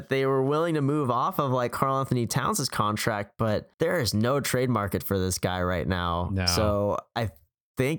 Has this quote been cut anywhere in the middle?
yes; 1 cut; at 3.7 s

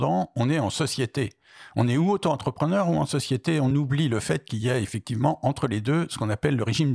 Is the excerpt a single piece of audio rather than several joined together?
yes; 0 cuts

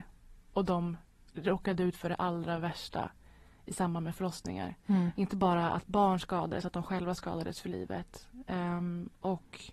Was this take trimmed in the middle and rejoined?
no; 0 cuts

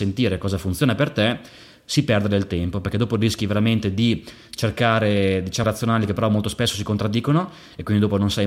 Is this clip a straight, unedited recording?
no; 1 cut; at 5.6 s

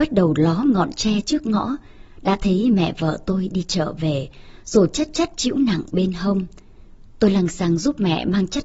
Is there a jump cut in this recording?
no; 0 cuts

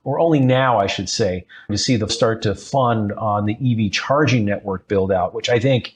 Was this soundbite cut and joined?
yes; 2 cuts; at 1.7 s, 2.1 s

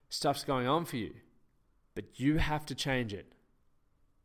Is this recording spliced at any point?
yes; 1 cut; at 1.6 s

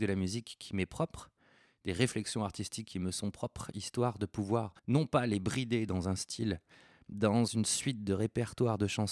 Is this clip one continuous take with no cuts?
no; 1 cut; at 4.8 s

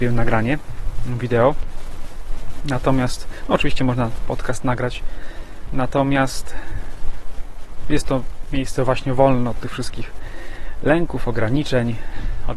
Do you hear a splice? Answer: no; 0 cuts

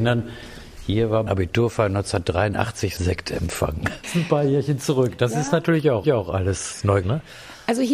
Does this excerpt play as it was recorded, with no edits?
no; 5 cuts; at 1.3 s, 3.0 s, 4.0 s, 6.0 s, 7.0 s

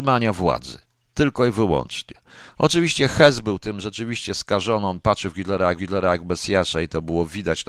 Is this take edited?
yes; 1 cut; at 5.8 s

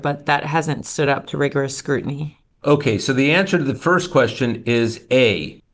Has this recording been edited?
no; 0 cuts

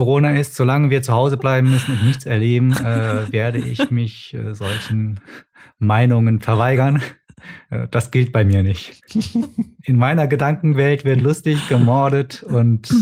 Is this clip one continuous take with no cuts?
yes; 0 cuts

